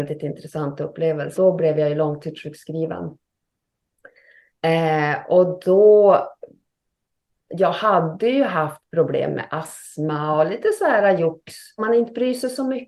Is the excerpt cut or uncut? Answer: cut